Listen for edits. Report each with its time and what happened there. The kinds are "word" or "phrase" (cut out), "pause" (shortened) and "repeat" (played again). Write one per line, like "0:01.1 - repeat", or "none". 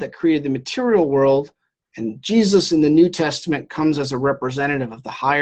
none